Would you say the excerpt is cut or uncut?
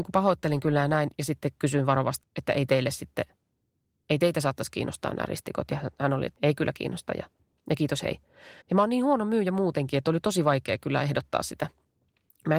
cut